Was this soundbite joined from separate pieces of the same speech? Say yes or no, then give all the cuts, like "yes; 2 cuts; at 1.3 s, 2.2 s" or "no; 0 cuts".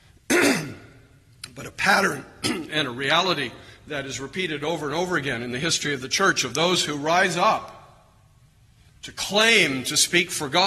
no; 0 cuts